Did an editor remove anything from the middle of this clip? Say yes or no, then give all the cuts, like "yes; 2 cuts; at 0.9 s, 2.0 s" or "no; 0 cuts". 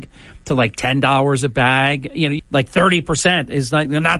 yes; 1 cut; at 2.4 s